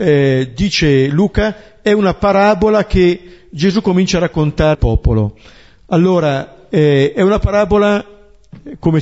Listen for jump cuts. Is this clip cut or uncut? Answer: cut